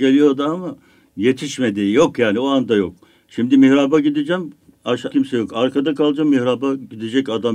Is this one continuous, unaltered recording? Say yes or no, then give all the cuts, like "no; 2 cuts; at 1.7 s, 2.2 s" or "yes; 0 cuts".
no; 1 cut; at 5.1 s